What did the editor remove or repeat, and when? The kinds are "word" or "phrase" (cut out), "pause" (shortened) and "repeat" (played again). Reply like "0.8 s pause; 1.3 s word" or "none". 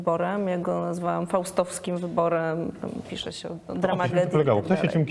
4.1 s word